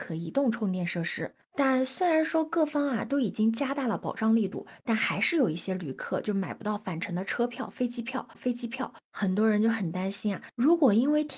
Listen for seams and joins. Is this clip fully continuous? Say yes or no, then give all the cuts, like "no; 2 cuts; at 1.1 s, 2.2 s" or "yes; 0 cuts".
no; 1 cut; at 8.3 s